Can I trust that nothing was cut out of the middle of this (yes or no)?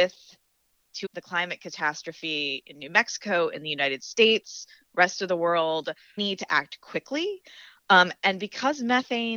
no